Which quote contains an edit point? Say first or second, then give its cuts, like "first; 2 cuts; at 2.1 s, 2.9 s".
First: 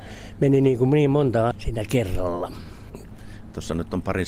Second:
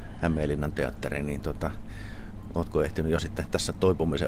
first; 1 cut; at 1.5 s